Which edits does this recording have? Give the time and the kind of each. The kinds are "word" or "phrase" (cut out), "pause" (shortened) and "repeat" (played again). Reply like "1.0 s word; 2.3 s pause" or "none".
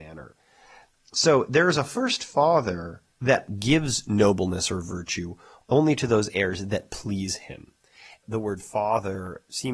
3.1 s pause